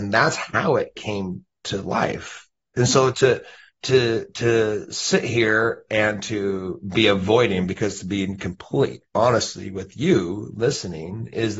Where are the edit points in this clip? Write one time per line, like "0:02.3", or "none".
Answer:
0:03.7